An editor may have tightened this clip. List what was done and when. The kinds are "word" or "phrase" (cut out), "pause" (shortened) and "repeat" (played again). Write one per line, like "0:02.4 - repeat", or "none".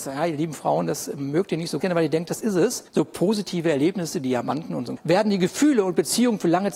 0:01.8 - word
0:02.9 - pause
0:05.0 - word

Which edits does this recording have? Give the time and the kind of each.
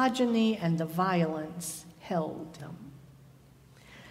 0:02.6 - word

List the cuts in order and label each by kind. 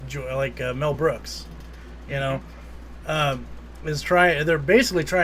none

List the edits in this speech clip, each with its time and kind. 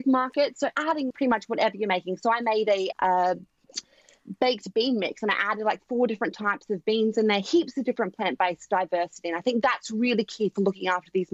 0:01.1 - phrase
0:02.9 - word
0:04.7 - phrase

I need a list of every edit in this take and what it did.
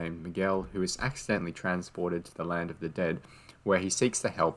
none

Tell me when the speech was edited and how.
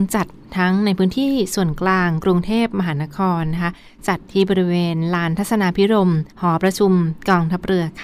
0:06.3 - pause

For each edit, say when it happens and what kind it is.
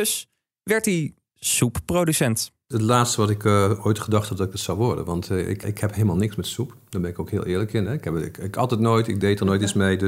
0:05.6 - word

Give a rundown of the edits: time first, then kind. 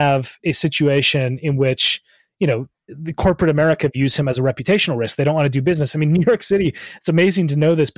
none

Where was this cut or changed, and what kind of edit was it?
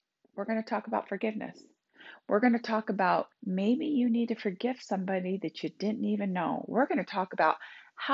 0:03.3 - pause

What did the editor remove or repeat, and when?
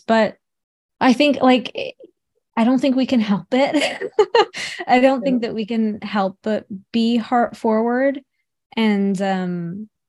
none

